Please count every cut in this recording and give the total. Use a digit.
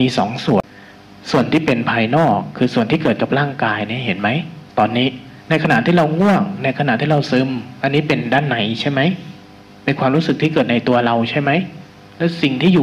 2